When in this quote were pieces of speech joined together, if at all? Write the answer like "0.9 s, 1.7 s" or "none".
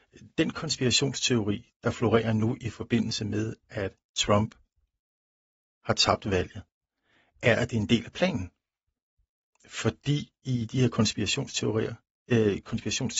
none